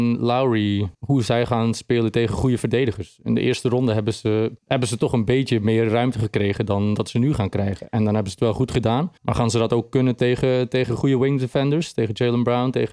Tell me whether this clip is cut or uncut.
cut